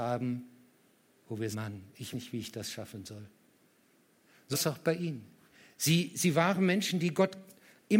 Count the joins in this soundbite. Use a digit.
3